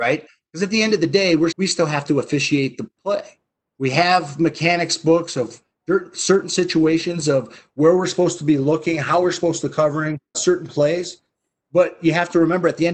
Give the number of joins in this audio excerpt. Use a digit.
3